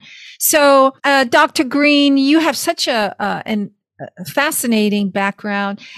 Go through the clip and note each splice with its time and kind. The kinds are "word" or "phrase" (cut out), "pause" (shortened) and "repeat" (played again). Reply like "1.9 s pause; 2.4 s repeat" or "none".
1.0 s pause